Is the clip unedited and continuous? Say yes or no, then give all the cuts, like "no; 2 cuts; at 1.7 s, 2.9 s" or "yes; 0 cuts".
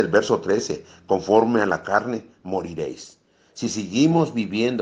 yes; 0 cuts